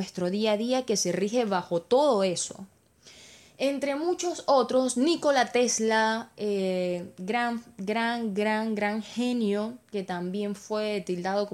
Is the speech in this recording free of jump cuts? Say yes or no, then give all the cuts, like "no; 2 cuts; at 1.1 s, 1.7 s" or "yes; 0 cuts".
yes; 0 cuts